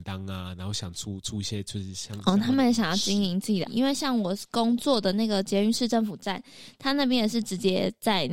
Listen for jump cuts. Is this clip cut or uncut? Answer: cut